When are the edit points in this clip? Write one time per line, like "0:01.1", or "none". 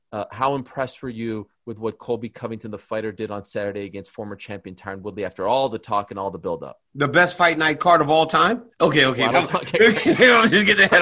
0:06.9
0:08.7
0:09.3